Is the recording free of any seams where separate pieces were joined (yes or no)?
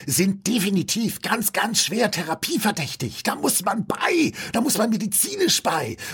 yes